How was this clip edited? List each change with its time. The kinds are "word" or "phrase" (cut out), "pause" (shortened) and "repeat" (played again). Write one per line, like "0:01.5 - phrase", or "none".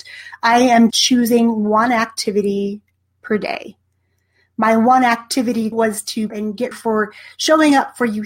0:00.9 - word
0:05.7 - word
0:06.3 - word
0:06.7 - word

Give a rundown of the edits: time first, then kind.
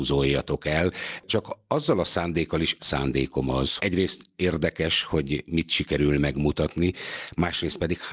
0:01.3 - word
0:02.8 - phrase
0:03.8 - word

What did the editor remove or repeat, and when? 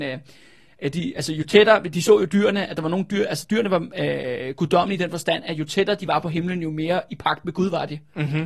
none

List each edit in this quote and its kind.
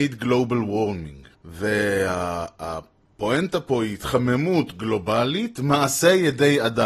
0:01.3 - pause

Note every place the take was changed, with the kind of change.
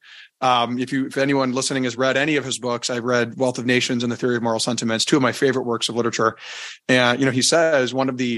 none

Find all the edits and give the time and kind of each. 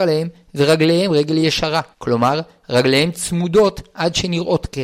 0:01.9 - pause

